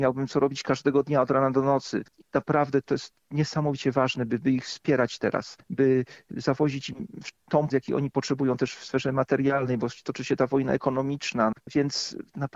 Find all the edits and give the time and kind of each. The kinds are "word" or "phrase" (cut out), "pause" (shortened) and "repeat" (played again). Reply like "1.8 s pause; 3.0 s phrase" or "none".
7.7 s word